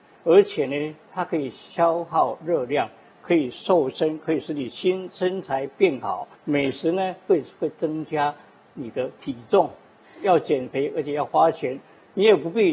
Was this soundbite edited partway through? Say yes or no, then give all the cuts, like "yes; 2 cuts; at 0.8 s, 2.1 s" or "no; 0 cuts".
yes; 1 cut; at 6.4 s